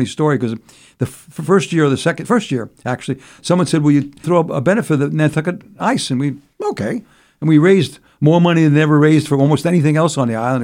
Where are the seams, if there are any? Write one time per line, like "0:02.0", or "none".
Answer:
none